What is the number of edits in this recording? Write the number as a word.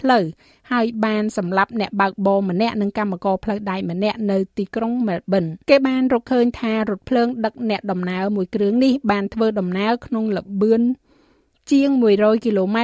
one